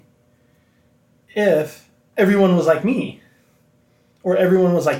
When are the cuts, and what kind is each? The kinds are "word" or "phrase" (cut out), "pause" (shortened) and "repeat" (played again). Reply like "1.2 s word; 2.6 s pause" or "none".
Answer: none